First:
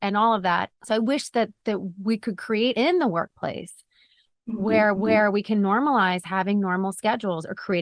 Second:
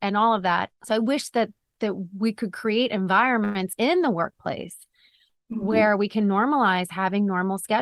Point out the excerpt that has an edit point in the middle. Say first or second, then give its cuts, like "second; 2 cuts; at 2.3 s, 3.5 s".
first; 3 cuts; at 1.6 s, 2.7 s, 4.9 s